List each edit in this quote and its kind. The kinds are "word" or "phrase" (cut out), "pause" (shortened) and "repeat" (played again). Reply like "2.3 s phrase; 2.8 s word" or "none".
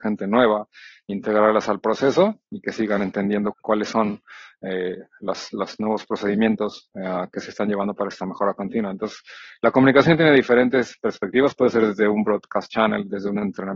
3.5 s word